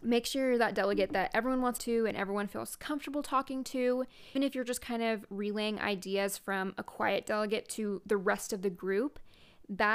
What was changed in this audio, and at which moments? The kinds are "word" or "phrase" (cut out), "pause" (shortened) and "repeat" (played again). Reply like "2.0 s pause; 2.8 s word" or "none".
1.8 s phrase; 4.4 s word